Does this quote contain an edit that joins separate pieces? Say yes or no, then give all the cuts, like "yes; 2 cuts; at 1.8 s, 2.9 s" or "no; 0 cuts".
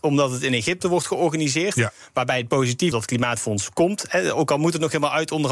yes; 1 cut; at 2.9 s